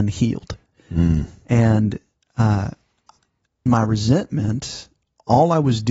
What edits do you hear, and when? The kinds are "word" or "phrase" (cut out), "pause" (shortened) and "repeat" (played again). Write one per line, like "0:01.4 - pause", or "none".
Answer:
0:03.7 - word